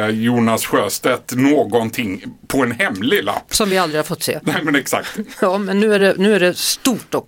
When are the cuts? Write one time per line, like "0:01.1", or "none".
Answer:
none